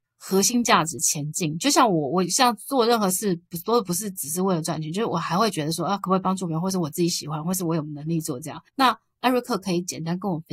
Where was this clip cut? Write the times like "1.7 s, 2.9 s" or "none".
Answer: 8.7 s